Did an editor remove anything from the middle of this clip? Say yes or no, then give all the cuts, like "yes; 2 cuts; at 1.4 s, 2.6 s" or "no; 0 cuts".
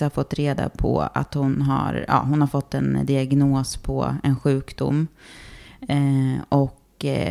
no; 0 cuts